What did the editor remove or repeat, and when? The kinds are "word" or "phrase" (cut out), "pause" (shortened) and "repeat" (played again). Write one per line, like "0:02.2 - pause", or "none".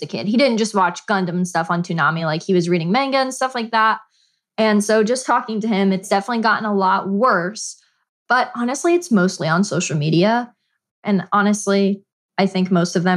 none